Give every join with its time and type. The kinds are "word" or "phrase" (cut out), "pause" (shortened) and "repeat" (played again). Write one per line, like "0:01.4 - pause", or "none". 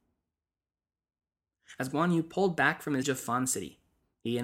0:03.0 - word